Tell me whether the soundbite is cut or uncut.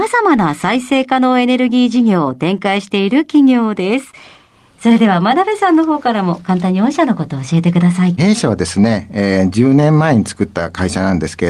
uncut